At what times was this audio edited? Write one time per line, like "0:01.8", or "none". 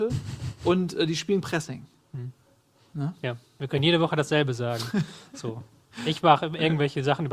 0:01.4